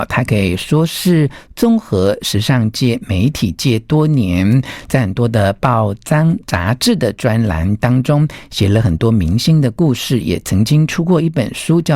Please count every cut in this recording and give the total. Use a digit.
1